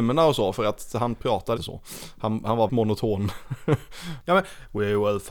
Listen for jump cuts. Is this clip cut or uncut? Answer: cut